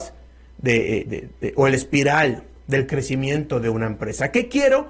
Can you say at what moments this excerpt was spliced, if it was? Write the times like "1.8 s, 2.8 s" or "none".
none